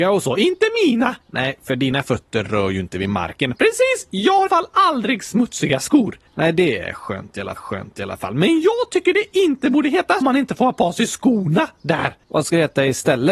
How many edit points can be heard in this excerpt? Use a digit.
6